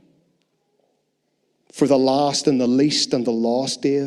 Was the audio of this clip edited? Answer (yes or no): no